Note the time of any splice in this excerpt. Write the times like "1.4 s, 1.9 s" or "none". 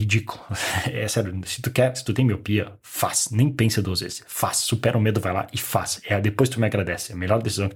none

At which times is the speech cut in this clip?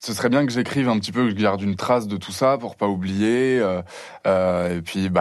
none

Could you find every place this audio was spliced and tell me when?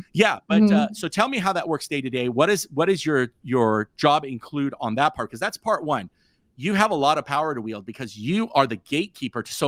none

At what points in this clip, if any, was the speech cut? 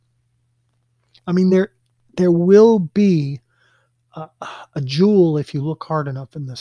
none

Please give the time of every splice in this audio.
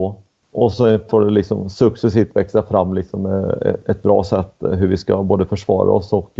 none

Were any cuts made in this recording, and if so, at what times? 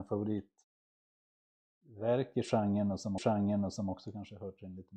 3.2 s

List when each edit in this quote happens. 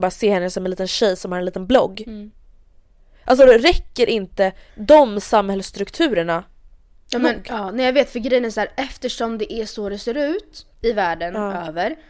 3.4 s, 4.7 s, 10.7 s

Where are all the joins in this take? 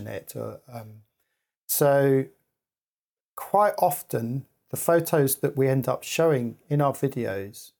none

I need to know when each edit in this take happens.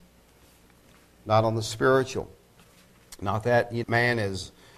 3.8 s

